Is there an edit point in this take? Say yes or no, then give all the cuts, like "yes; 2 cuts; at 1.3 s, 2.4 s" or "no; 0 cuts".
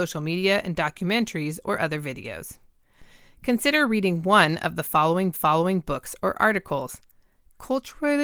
yes; 1 cut; at 5.3 s